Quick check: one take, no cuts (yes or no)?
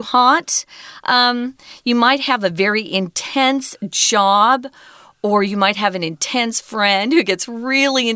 yes